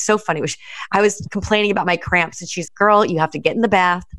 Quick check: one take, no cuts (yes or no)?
no